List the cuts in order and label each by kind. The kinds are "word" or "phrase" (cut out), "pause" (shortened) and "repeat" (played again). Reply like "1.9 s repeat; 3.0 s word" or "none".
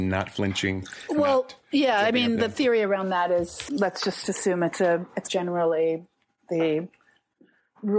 3.7 s word; 5.3 s phrase